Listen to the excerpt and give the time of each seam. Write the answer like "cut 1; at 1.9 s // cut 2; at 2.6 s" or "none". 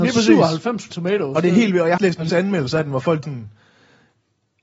cut 1; at 0.9 s // cut 2; at 2.0 s // cut 3; at 2.3 s // cut 4; at 3.2 s